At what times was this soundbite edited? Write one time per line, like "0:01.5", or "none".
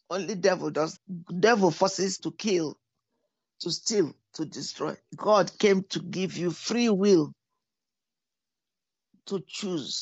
0:01.0
0:02.2
0:05.1

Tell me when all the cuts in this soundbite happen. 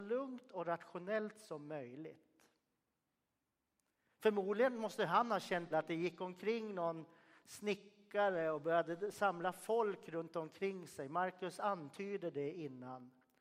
0:05.7

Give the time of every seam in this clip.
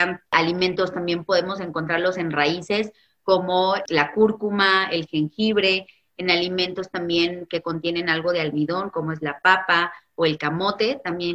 none

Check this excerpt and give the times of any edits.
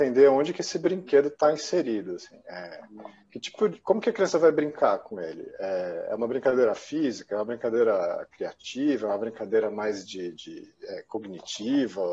none

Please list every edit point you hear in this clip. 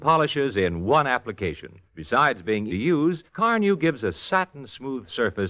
0:01.9
0:02.7
0:03.3

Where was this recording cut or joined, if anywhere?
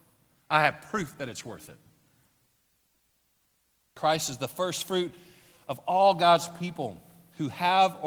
none

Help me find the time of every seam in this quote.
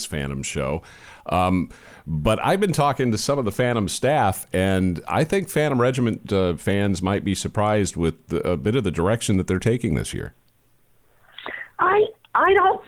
none

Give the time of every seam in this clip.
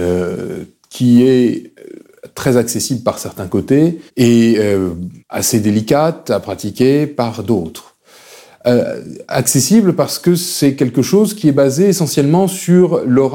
0:04.1
0:05.2

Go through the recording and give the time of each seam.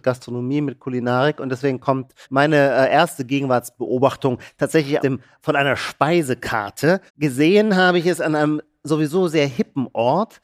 0:02.2
0:05.0
0:07.1

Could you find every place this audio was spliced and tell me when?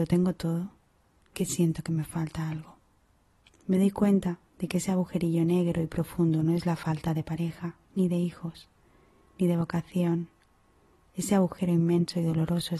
0:01.3
0:03.0

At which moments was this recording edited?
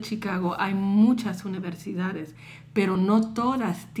none

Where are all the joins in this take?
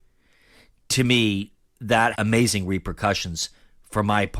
0:02.1

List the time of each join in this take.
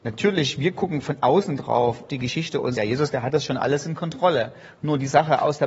0:02.1
0:02.7

